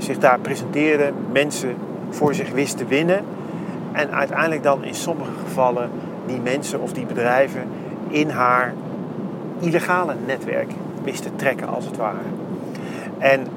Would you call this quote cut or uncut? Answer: uncut